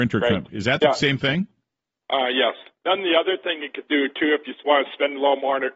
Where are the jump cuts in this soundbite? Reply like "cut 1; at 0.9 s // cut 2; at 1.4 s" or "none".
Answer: none